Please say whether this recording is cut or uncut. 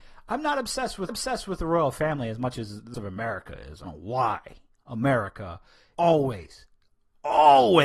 cut